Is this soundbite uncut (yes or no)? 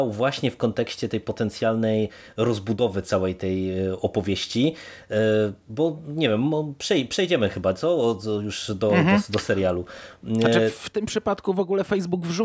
yes